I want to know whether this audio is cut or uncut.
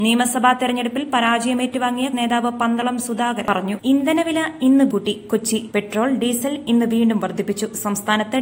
cut